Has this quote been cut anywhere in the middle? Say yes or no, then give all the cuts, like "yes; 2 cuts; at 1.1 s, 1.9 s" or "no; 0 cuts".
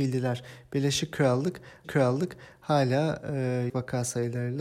yes; 2 cuts; at 1.8 s, 3.7 s